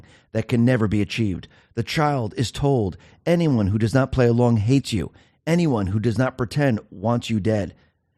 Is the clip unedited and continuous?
yes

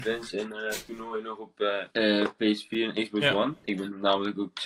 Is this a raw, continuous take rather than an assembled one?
no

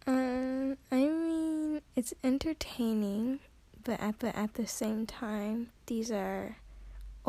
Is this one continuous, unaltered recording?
no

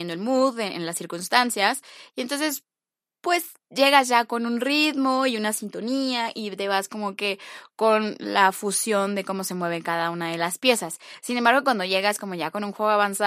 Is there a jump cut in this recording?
no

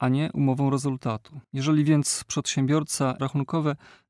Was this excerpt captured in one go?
no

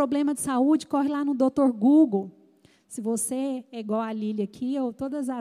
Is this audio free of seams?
yes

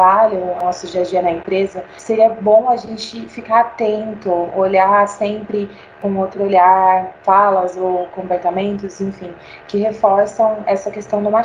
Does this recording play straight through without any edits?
yes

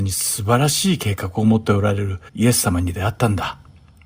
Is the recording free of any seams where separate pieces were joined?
no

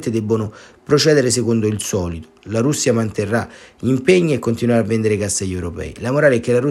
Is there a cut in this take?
no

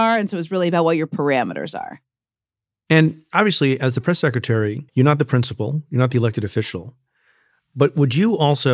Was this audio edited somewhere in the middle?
yes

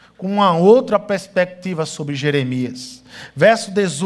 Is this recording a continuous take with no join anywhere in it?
yes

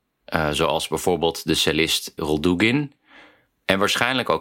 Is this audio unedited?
no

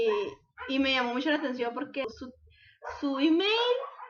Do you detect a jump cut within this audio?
no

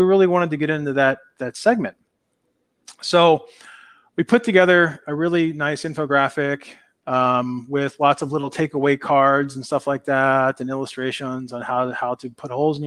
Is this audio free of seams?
yes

